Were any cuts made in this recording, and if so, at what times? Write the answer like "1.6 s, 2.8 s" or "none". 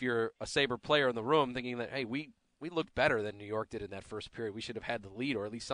none